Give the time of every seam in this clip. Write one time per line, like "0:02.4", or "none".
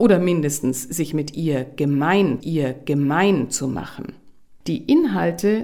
0:02.4

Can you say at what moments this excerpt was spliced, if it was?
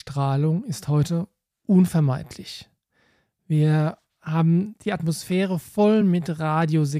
none

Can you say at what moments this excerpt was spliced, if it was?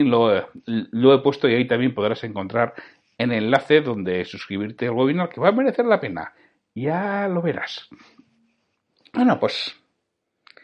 none

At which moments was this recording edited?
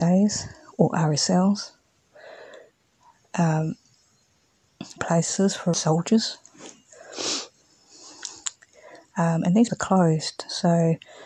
0:05.0
0:05.7
0:09.7

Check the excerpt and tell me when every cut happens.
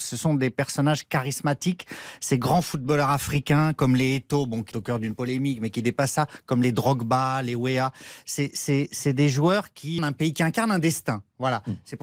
0:04.7
0:10.0

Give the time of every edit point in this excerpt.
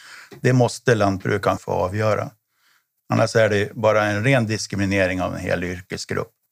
0:01.6

